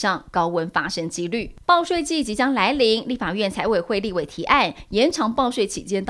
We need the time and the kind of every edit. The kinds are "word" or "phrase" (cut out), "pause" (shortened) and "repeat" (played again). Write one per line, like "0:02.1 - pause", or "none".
0:01.6 - pause